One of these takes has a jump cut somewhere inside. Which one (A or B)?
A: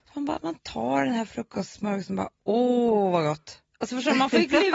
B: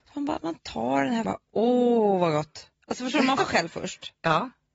B